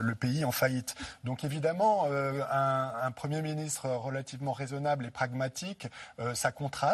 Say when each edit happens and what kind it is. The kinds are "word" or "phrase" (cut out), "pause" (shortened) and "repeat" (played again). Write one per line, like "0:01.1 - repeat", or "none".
none